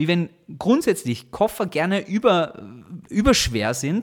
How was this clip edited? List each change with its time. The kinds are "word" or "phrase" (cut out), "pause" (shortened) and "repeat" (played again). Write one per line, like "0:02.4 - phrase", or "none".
none